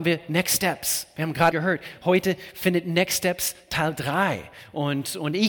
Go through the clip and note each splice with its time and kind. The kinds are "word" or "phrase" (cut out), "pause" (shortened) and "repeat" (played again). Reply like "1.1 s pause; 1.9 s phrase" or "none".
1.5 s word